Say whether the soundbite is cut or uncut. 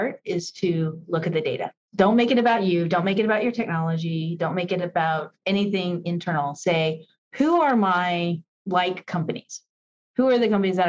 uncut